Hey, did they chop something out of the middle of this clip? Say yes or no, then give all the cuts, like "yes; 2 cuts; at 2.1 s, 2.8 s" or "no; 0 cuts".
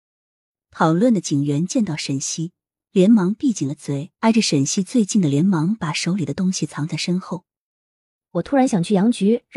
yes; 1 cut; at 4.1 s